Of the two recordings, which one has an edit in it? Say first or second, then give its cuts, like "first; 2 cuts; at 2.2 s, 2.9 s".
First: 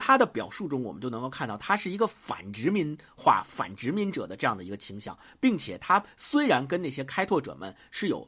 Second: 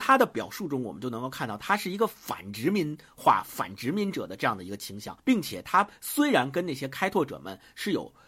second; 1 cut; at 5.2 s